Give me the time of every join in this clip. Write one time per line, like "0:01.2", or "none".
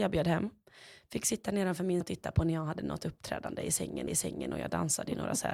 0:02.0
0:04.1